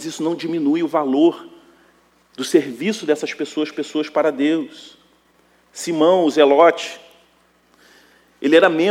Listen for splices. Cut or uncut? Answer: cut